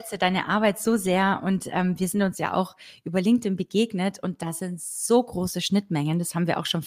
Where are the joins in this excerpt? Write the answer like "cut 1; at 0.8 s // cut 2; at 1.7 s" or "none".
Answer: none